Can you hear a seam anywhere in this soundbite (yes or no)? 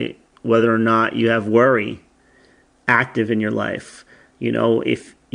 no